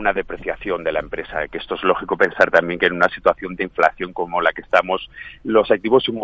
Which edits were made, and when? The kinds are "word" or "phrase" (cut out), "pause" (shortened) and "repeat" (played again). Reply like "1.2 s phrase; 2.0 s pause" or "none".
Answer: 3.6 s word